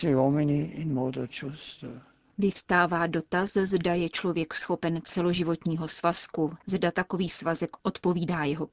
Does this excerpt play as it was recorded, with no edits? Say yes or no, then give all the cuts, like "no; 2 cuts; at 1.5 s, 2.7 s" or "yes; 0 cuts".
no; 1 cut; at 6.6 s